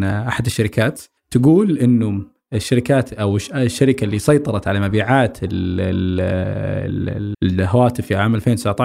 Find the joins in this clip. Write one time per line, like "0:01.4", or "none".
0:01.2
0:07.3